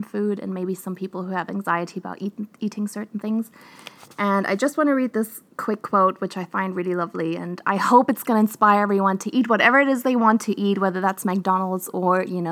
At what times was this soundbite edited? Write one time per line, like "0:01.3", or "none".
0:05.5